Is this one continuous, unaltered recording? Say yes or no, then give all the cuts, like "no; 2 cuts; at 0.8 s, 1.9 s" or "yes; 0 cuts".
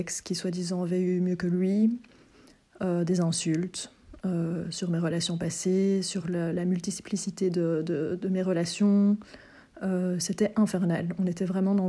yes; 0 cuts